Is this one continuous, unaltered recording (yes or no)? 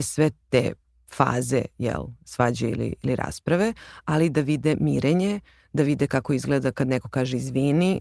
yes